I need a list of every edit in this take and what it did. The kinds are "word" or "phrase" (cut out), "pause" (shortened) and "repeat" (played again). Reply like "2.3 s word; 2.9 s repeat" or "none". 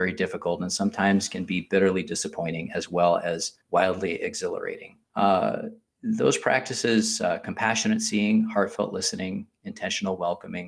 3.6 s pause; 5.0 s pause